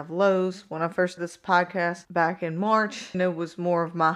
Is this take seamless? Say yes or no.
no